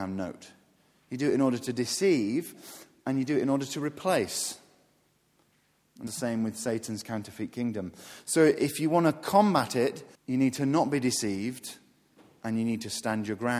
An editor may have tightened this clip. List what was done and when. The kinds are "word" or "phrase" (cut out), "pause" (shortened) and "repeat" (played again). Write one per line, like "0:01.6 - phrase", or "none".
0:06.1 - word
0:10.1 - pause